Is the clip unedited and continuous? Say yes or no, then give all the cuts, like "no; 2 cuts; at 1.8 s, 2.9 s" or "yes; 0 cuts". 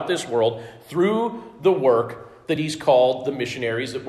yes; 0 cuts